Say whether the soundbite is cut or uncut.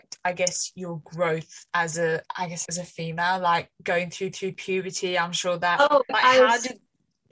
cut